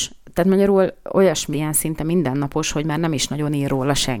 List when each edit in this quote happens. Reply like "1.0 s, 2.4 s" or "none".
1.5 s